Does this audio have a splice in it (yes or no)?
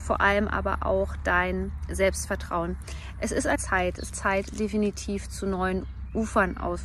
yes